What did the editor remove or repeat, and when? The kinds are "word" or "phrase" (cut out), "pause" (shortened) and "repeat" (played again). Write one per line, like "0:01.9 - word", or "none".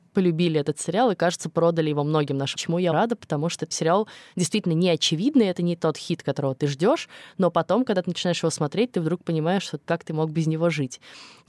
0:02.5 - word
0:02.9 - word
0:03.7 - word